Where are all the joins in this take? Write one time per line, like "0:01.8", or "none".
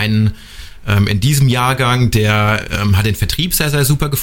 none